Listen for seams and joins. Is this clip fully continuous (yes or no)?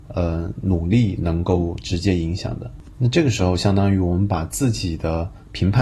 yes